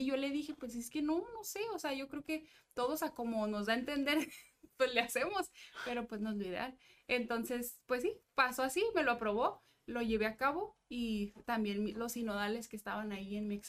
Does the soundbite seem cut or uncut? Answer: uncut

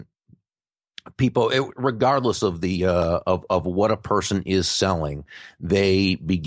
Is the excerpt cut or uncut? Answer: uncut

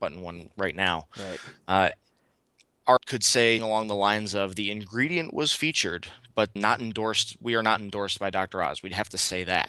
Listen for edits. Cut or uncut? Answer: cut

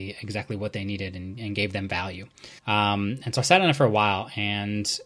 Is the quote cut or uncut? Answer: cut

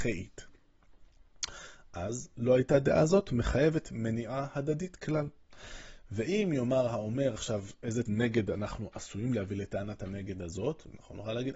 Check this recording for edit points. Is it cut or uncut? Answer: cut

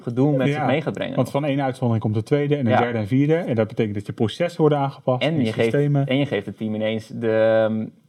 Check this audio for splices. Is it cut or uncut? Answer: uncut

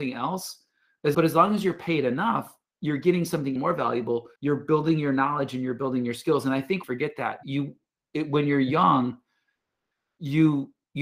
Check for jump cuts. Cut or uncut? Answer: cut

